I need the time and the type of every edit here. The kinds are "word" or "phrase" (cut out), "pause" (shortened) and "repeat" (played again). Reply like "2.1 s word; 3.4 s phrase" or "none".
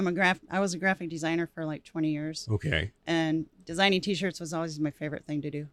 3.0 s pause